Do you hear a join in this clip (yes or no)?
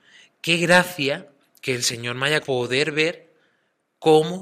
yes